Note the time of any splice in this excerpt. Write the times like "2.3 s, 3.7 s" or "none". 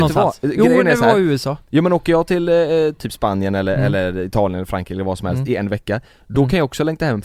none